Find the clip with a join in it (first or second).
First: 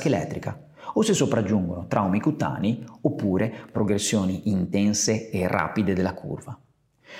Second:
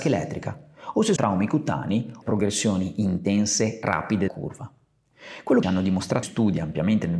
second